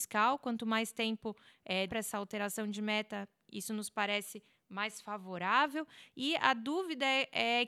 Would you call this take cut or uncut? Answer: cut